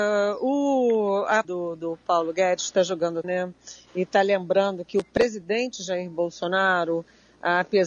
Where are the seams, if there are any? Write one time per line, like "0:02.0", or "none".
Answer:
0:01.4
0:03.2